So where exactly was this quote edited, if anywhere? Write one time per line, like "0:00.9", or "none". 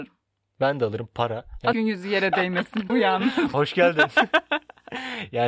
0:01.7
0:02.9
0:03.5